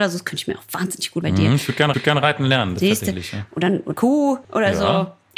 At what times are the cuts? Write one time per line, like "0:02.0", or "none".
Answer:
0:01.2
0:01.9
0:03.9
0:04.4